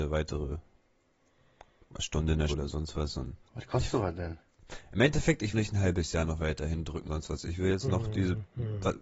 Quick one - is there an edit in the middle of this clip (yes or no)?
yes